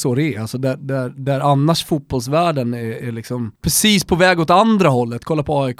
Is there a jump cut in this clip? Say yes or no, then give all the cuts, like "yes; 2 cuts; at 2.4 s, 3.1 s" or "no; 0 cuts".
yes; 1 cut; at 3.6 s